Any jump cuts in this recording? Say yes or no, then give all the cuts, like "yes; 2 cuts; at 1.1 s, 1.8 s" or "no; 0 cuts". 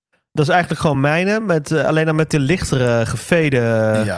no; 0 cuts